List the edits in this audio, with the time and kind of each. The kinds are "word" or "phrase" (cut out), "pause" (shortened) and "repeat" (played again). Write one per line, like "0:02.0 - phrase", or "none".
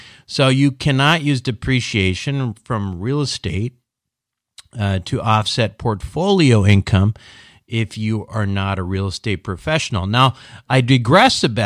none